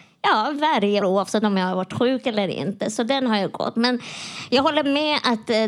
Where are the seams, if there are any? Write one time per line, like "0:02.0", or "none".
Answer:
0:01.0